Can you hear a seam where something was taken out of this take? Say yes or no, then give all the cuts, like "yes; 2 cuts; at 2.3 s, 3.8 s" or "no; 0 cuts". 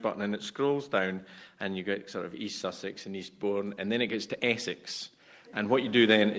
no; 0 cuts